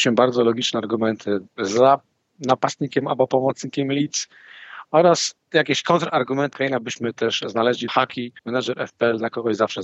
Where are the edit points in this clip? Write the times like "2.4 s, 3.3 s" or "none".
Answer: 1.5 s, 5.4 s, 6.5 s, 7.9 s, 8.4 s